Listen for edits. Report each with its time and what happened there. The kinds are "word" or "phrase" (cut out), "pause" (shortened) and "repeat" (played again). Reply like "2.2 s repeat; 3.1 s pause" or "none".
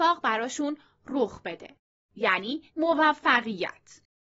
2.7 s pause